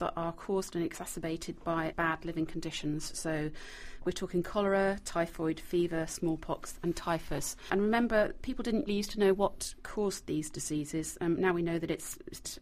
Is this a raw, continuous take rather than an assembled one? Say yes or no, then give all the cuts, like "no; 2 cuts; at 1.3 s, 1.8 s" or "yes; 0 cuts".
no; 1 cut; at 8.9 s